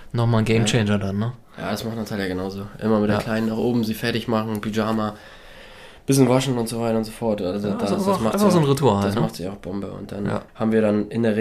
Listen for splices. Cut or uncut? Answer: cut